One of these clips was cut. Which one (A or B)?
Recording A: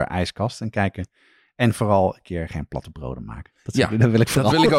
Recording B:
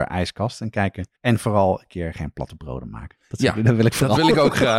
B